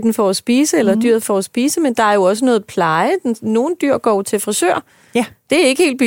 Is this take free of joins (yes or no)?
yes